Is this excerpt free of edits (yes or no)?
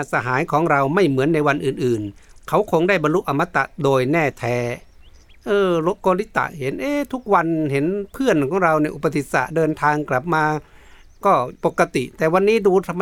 yes